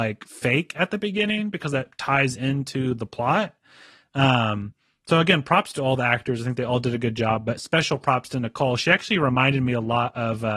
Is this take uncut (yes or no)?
yes